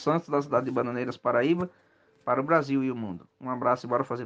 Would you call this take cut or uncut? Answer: uncut